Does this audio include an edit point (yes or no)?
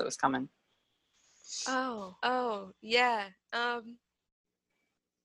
yes